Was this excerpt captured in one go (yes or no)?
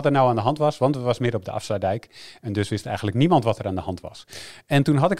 yes